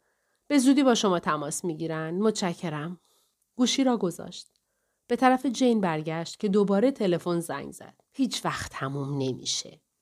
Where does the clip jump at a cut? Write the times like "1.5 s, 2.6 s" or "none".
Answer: 8.1 s